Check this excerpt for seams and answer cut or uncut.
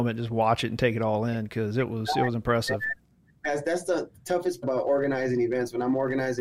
cut